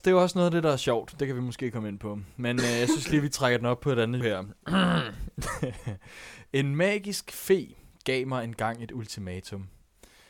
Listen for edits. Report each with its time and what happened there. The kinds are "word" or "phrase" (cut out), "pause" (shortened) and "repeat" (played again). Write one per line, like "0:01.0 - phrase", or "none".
0:04.2 - word